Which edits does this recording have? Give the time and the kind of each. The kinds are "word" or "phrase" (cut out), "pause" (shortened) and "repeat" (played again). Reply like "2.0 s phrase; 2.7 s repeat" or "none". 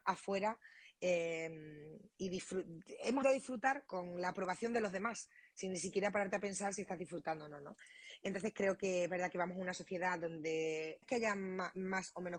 3.2 s word; 3.9 s word; 11.0 s word